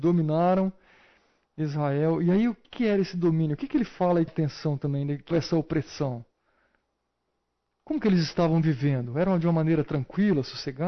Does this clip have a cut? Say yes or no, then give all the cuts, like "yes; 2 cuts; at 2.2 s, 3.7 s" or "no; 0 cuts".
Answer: yes; 3 cuts; at 2.6 s, 4.3 s, 5.3 s